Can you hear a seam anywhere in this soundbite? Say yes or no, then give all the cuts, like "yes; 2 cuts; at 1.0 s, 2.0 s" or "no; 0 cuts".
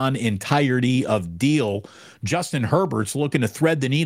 no; 0 cuts